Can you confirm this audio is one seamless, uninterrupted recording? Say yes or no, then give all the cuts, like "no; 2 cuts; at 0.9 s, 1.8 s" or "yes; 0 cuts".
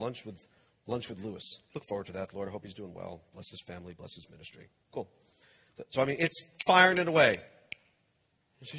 yes; 0 cuts